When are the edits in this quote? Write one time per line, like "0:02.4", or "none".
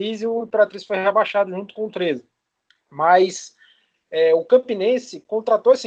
none